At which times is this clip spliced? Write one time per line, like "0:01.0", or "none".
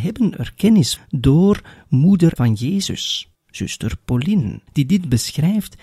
0:01.0
0:02.4
0:03.3
0:04.7